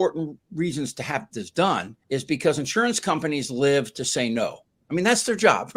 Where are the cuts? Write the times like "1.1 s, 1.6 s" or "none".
2.0 s